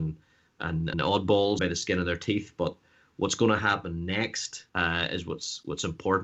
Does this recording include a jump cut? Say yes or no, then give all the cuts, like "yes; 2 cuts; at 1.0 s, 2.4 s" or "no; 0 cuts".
yes; 3 cuts; at 0.9 s, 1.6 s, 4.7 s